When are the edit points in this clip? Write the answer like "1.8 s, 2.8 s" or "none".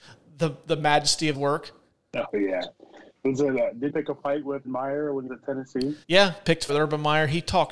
1.3 s, 1.9 s, 3.9 s, 4.6 s, 5.3 s, 6.0 s, 6.7 s